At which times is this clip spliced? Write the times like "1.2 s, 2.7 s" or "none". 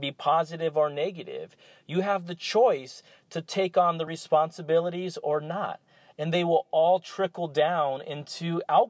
none